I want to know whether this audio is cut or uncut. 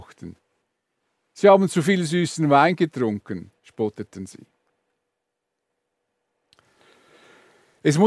cut